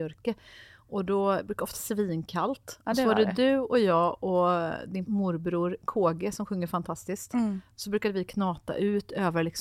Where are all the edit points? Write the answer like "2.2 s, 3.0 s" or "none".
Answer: 1.7 s, 5.1 s